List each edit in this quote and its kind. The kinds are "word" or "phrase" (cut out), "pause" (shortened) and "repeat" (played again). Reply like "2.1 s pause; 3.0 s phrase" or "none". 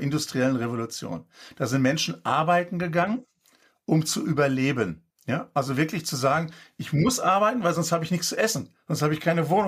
none